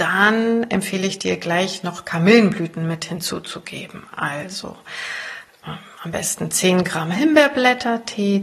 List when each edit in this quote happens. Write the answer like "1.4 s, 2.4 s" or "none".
none

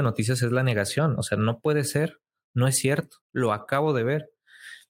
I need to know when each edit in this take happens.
3.2 s

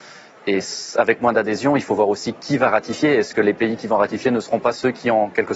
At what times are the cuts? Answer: none

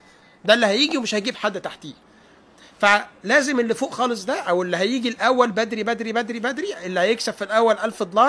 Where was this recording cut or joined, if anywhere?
none

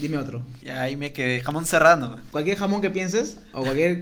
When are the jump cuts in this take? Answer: none

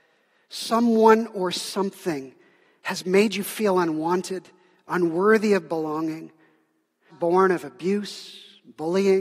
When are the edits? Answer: 7.1 s

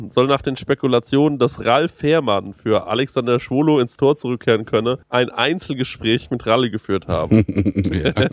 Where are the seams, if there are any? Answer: 5.0 s

